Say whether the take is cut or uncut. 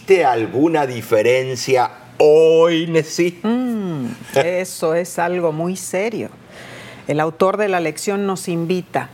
uncut